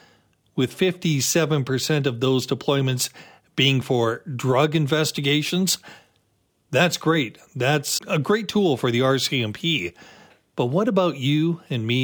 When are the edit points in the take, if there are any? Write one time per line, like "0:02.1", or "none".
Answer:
0:08.0